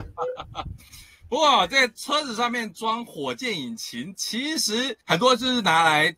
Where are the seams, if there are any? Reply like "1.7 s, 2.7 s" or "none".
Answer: 5.0 s